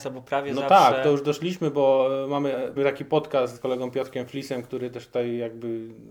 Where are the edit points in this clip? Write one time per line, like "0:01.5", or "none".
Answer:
0:02.8
0:03.5